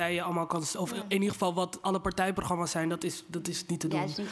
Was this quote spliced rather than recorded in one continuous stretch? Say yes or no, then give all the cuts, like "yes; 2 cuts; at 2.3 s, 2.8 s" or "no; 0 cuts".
no; 0 cuts